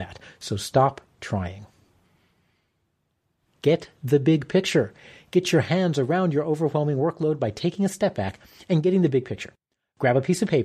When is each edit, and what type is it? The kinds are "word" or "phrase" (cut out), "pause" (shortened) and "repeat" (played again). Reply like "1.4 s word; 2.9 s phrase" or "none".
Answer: none